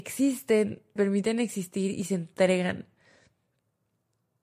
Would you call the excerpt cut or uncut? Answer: cut